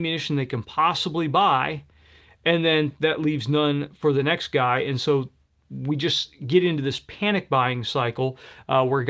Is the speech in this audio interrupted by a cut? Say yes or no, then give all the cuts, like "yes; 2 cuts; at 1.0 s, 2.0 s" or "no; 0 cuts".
no; 0 cuts